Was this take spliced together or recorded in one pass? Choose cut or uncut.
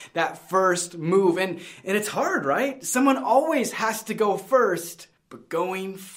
cut